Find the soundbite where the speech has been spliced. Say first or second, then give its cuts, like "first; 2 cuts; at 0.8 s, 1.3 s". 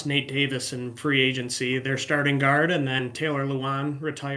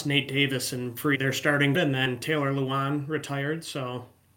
second; 2 cuts; at 1.1 s, 1.7 s